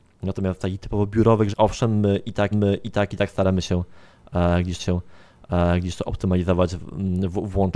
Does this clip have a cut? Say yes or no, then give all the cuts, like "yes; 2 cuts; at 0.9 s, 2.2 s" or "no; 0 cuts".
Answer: yes; 3 cuts; at 1.5 s, 2.5 s, 4.8 s